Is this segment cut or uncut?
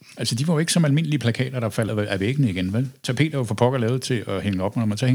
cut